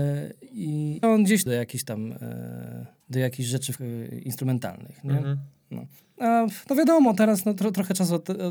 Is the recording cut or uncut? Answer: cut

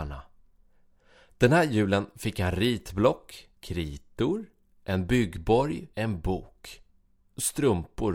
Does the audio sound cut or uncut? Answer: cut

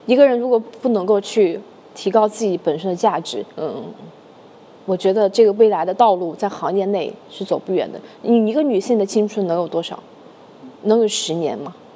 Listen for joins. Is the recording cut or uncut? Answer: cut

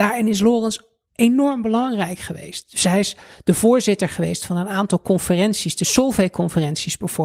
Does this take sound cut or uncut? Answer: uncut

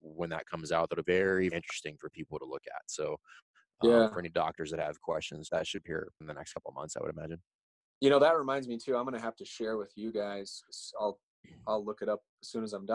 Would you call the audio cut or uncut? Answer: cut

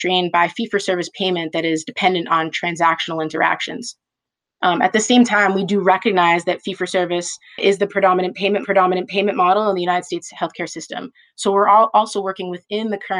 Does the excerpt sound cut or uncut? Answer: cut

